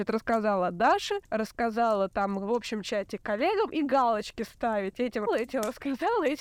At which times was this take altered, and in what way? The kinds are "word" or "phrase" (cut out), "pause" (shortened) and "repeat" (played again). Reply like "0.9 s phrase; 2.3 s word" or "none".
1.2 s pause; 5.3 s word